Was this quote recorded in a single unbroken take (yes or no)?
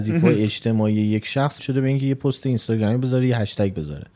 no